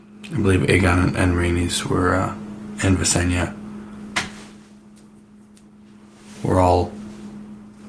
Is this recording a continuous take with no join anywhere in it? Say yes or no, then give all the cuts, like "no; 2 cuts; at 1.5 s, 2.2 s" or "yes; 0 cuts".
yes; 0 cuts